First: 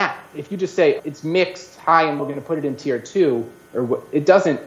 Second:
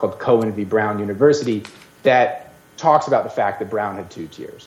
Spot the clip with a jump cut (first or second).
first